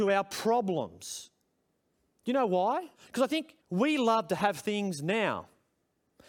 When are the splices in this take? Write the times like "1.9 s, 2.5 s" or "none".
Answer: 1.8 s, 3.0 s, 3.6 s